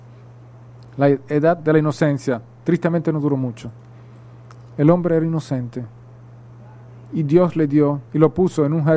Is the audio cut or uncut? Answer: cut